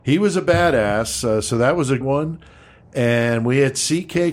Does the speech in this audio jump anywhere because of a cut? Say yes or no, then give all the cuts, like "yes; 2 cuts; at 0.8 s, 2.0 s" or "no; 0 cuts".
yes; 1 cut; at 2.0 s